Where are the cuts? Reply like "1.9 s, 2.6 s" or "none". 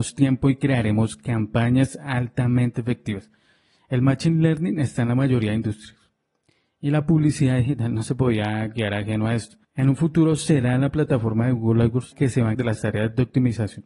12.1 s, 12.5 s